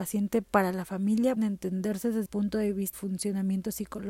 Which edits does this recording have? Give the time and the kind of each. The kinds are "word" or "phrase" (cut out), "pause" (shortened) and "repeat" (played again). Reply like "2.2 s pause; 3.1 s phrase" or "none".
1.4 s word; 2.3 s word; 2.9 s word